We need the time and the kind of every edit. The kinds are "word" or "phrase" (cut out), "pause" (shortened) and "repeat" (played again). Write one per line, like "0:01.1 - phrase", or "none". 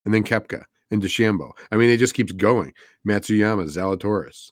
none